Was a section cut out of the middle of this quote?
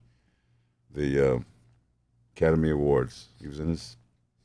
no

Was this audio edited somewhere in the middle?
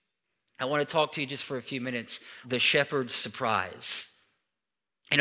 yes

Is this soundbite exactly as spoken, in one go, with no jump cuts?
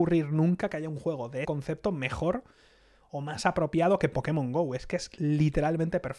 no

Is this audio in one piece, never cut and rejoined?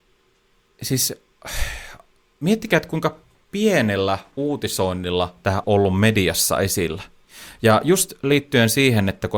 no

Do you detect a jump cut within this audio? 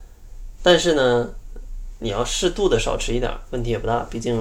no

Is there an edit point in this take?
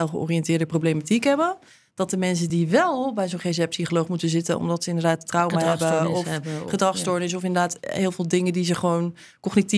no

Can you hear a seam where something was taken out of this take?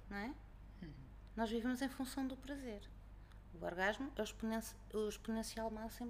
no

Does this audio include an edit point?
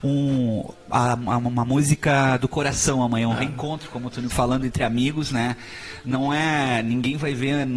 yes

